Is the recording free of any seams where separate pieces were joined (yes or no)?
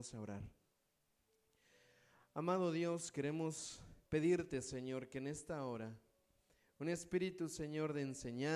no